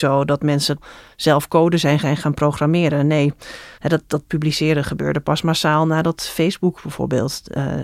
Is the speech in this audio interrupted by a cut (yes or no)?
yes